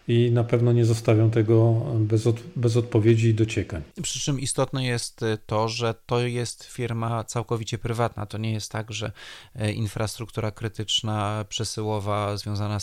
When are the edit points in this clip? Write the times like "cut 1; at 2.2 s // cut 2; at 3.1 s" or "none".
cut 1; at 3.9 s

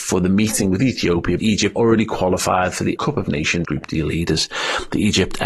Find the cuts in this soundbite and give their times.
cut 1; at 1.4 s // cut 2; at 1.8 s // cut 3; at 3.0 s // cut 4; at 3.6 s

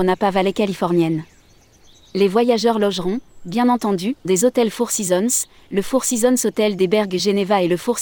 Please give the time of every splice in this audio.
cut 1; at 4.2 s

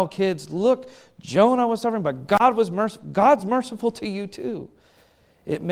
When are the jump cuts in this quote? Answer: none

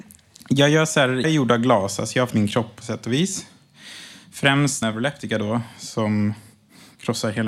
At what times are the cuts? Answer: cut 1; at 1.2 s // cut 2; at 2.3 s // cut 3; at 2.8 s // cut 4; at 4.8 s

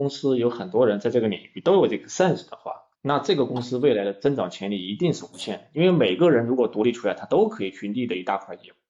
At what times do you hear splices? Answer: cut 1; at 2.9 s

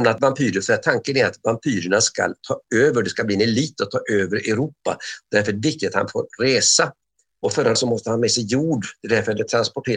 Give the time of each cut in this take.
cut 1; at 7.8 s

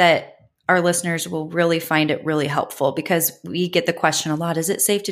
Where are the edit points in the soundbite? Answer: none

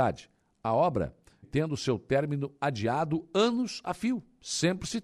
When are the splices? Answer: cut 1; at 1.4 s

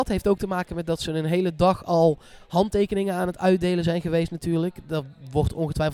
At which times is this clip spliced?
none

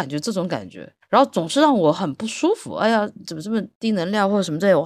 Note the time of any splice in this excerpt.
cut 1; at 1.0 s

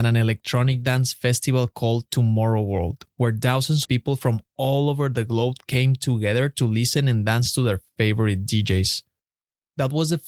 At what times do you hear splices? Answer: cut 1; at 3.8 s

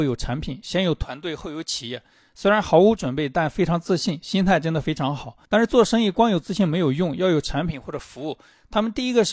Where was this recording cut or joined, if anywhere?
cut 1; at 5.4 s

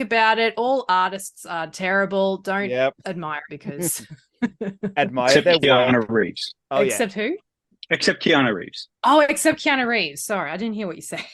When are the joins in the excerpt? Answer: cut 1; at 3.5 s // cut 2; at 6.6 s

